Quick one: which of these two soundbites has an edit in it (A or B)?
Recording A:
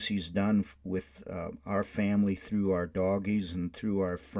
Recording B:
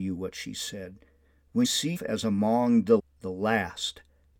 B